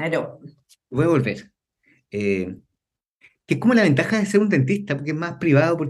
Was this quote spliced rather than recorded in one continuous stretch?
no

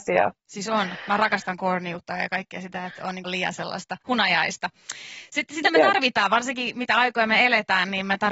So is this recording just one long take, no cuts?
no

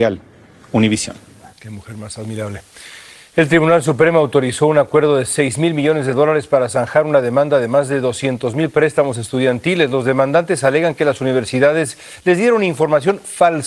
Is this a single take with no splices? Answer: no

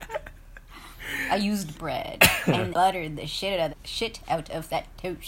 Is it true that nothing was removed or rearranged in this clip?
no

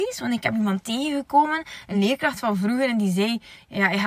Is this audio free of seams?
yes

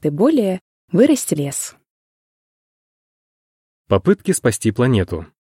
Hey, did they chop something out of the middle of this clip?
yes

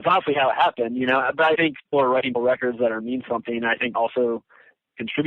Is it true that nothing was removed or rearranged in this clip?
no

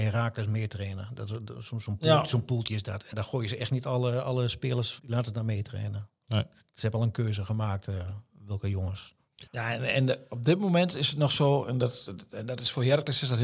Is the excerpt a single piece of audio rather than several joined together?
no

